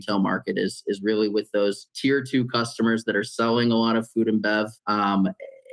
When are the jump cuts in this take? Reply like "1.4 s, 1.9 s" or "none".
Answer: 1.9 s, 4.8 s